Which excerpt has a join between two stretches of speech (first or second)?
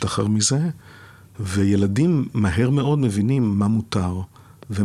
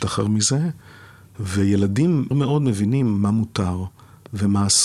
second